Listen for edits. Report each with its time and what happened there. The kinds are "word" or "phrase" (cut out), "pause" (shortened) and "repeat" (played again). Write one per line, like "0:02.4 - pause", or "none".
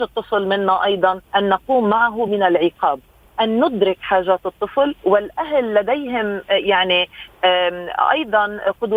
0:01.3 - pause
0:02.3 - word
0:03.2 - word